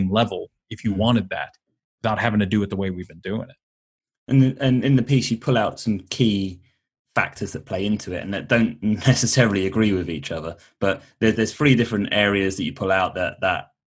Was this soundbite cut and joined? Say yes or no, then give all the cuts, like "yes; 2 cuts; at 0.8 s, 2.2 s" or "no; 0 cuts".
yes; 1 cut; at 11.3 s